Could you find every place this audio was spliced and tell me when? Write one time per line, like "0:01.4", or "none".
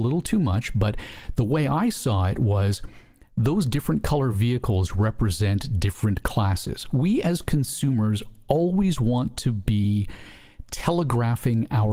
none